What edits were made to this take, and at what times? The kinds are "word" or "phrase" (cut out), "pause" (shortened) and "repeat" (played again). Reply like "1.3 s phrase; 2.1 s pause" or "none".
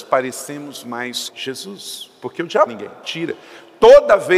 1.3 s word; 2.7 s phrase; 3.0 s phrase